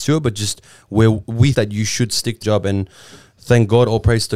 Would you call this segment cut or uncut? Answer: cut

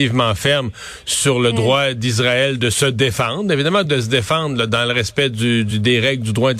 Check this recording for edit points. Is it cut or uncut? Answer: uncut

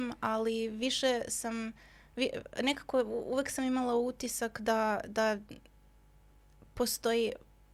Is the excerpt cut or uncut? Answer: uncut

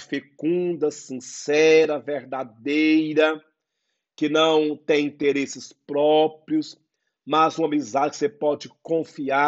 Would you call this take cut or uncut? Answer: uncut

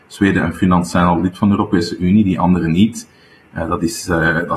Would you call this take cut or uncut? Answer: uncut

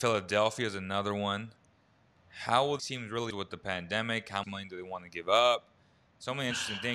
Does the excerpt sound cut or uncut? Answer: cut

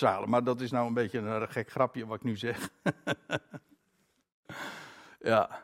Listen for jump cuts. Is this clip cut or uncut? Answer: uncut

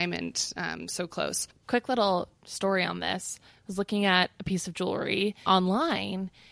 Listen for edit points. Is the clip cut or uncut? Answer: cut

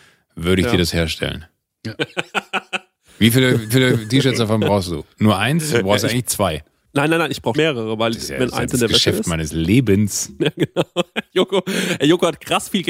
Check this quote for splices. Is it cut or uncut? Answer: cut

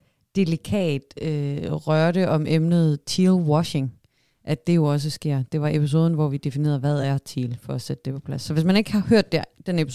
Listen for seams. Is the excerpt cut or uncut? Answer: uncut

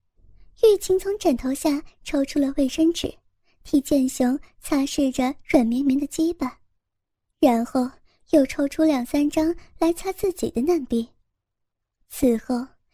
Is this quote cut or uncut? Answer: uncut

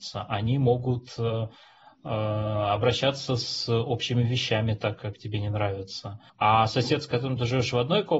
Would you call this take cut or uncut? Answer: cut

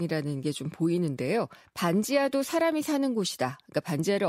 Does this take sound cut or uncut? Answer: uncut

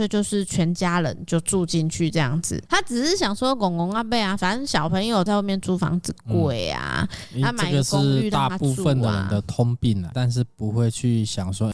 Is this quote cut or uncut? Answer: cut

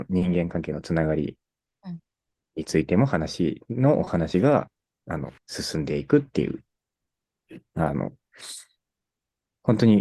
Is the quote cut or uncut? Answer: cut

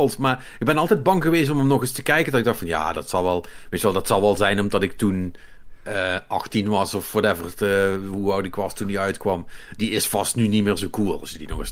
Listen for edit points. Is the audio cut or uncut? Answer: uncut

